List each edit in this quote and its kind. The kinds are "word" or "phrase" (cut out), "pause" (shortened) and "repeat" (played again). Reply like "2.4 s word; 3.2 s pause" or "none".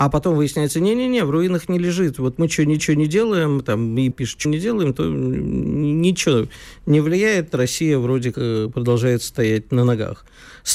2.8 s repeat; 4.1 s phrase; 4.4 s word; 8.3 s word